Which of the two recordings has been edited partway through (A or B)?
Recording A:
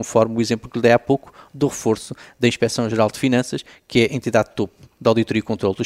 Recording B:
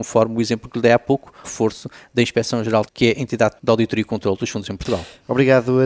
B